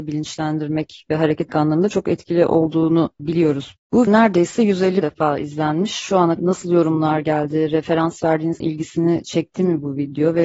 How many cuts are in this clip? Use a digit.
5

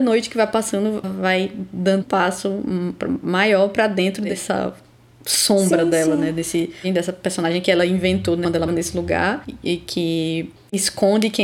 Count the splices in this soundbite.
3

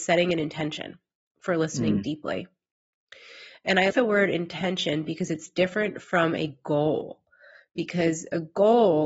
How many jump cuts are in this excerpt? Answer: 1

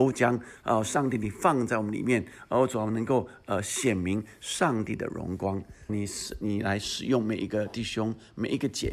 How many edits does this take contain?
1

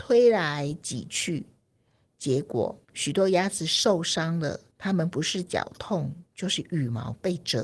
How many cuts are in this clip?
2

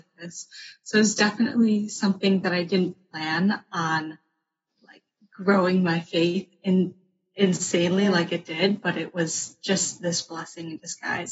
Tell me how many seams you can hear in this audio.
0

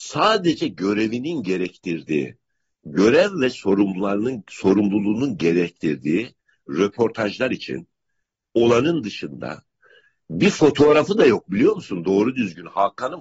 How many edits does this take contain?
0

